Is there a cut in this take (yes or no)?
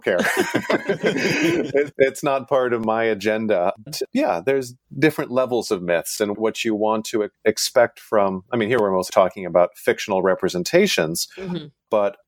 yes